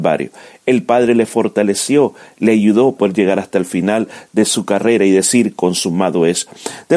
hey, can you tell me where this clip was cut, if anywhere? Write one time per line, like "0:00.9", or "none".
0:03.0